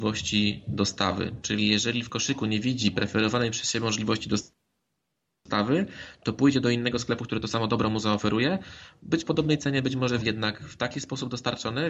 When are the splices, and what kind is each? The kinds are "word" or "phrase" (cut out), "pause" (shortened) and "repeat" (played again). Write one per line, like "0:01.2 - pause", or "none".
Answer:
0:09.2 - word
0:10.2 - phrase